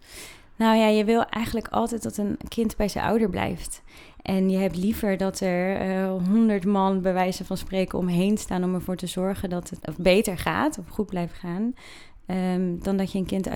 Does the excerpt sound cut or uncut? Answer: cut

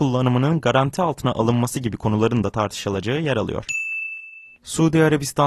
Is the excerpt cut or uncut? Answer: uncut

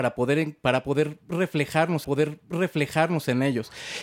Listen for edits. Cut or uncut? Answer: cut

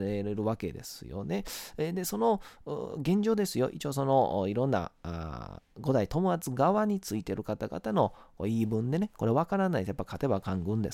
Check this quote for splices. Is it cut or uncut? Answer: uncut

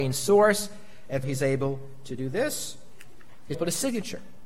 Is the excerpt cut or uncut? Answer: cut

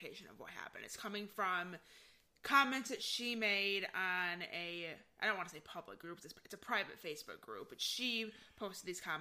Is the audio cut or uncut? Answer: uncut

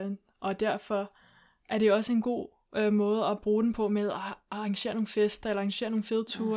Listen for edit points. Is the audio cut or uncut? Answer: uncut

